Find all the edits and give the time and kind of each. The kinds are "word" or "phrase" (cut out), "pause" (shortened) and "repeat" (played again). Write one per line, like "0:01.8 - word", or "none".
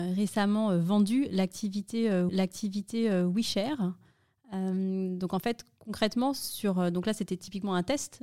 0:02.3 - repeat